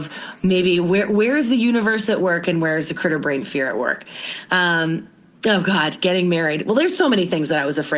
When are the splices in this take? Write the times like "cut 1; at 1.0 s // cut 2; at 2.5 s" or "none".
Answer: none